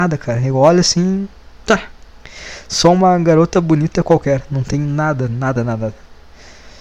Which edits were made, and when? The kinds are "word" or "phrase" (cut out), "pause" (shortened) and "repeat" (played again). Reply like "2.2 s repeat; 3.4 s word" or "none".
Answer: none